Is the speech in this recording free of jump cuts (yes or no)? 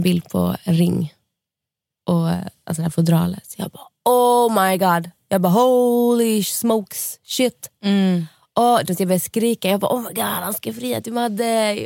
yes